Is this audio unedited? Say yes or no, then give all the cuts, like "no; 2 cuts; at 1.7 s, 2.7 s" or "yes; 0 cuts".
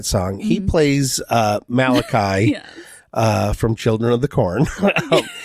yes; 0 cuts